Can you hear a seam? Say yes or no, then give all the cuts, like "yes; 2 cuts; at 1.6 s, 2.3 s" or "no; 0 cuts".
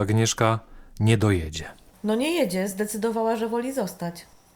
no; 0 cuts